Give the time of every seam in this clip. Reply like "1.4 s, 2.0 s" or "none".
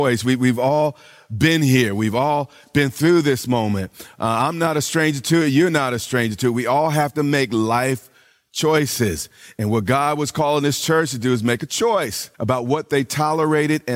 12.3 s